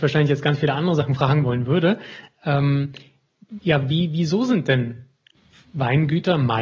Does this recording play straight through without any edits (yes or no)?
yes